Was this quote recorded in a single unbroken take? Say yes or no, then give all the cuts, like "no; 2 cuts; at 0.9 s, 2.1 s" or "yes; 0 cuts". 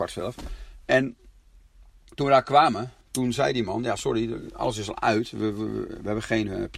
yes; 0 cuts